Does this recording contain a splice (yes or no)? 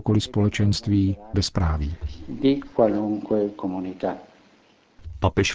yes